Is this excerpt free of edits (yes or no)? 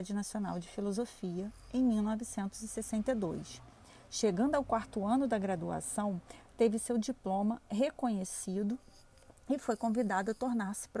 yes